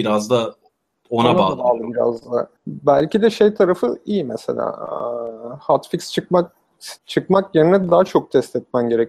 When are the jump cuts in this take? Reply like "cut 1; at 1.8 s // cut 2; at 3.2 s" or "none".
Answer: cut 1; at 2.6 s // cut 2; at 7.0 s